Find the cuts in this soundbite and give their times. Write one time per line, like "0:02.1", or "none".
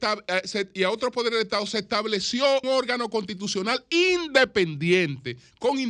0:02.6